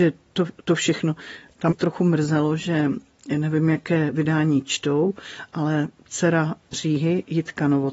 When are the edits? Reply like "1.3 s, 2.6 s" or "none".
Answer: 1.7 s, 6.7 s